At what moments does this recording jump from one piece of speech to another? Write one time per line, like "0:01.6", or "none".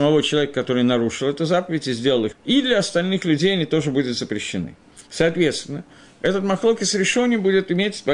0:02.3
0:05.1